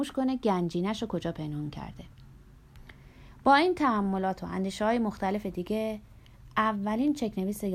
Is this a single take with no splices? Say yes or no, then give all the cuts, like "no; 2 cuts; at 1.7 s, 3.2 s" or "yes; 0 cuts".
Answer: yes; 0 cuts